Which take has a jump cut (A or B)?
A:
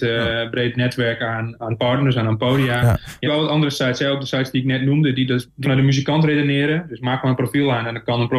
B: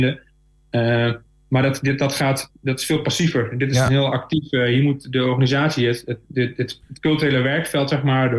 A